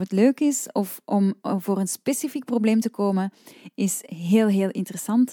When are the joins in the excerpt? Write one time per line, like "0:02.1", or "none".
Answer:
none

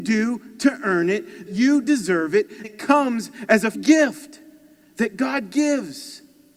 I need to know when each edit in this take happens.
0:01.5
0:01.8
0:02.6
0:03.7

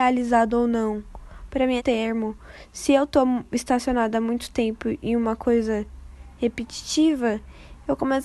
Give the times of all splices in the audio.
0:01.8

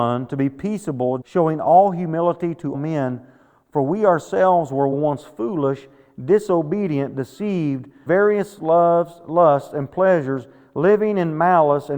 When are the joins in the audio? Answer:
0:01.2
0:02.7
0:04.9
0:08.1

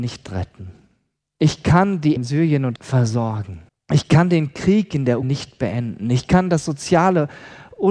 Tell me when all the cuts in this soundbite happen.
0:02.2
0:02.8
0:03.7
0:05.2

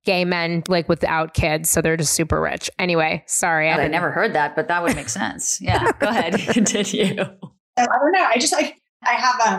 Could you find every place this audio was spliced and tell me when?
0:03.8

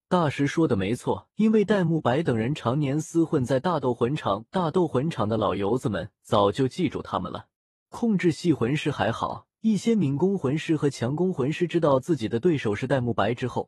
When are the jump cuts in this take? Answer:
0:01.3
0:07.6
0:09.5

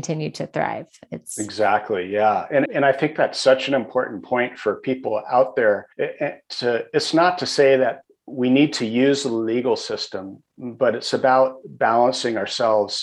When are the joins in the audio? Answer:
0:02.7
0:05.9
0:08.1

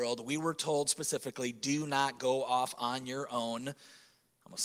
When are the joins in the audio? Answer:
none

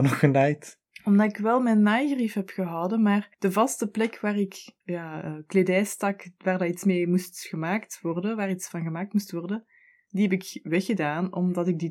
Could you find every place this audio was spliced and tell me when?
0:03.3
0:04.8

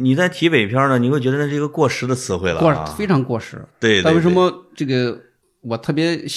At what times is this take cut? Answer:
none

